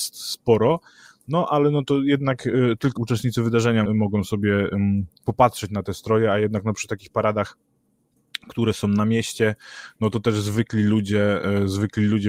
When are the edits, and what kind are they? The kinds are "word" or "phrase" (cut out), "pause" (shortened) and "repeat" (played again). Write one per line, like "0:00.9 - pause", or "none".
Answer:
0:03.0 - word
0:03.9 - word